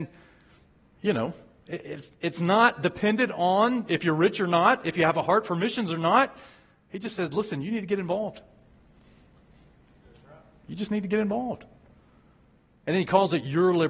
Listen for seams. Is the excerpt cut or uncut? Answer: uncut